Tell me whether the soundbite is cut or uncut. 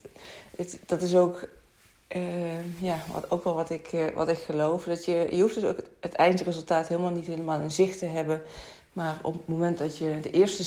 uncut